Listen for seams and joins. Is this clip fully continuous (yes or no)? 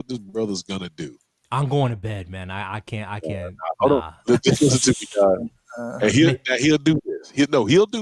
yes